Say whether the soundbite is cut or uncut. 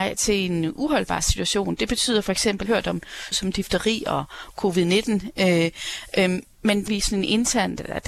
cut